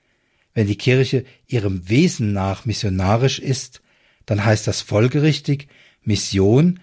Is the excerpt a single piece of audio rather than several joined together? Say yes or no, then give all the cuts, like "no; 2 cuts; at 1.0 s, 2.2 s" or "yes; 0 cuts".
yes; 0 cuts